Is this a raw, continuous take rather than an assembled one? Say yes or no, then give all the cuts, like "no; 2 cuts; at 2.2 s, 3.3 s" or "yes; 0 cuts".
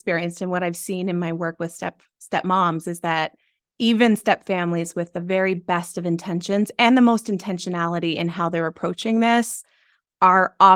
yes; 0 cuts